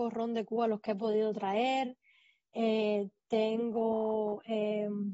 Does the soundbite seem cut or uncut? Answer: uncut